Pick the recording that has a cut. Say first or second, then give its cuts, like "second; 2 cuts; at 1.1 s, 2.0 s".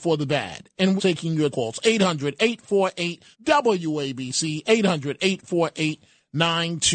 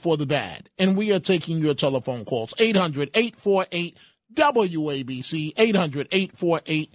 first; 3 cuts; at 1.0 s, 1.5 s, 3.3 s